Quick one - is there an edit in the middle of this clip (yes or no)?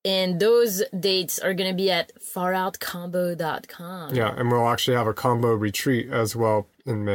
no